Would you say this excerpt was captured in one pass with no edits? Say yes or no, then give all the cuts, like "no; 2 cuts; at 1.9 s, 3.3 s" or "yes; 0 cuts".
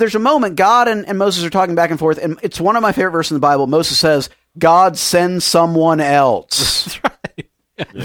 yes; 0 cuts